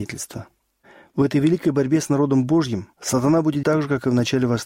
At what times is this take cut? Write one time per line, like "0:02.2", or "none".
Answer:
0:02.9
0:03.6